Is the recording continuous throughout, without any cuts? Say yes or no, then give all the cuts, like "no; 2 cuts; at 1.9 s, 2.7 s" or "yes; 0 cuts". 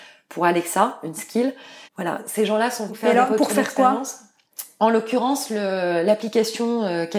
no; 2 cuts; at 1.8 s, 2.9 s